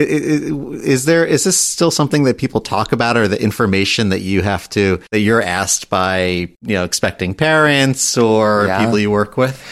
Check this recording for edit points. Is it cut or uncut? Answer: cut